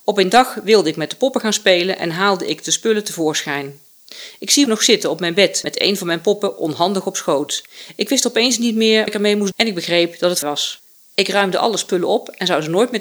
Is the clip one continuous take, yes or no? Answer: no